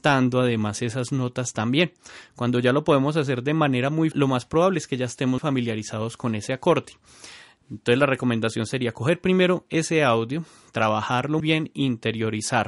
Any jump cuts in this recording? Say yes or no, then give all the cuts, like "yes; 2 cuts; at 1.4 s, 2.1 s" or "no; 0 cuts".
yes; 3 cuts; at 4.1 s, 5.4 s, 11.4 s